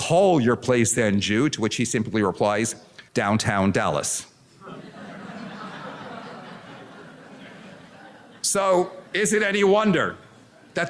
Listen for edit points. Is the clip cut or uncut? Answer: cut